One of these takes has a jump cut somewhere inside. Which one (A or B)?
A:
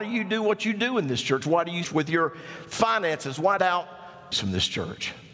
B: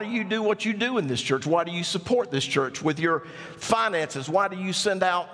A